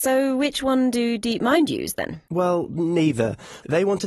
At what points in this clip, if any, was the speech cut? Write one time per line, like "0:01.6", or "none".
0:02.3